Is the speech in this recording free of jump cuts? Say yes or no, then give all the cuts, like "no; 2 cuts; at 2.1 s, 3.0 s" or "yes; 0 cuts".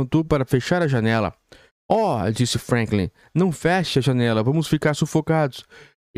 yes; 0 cuts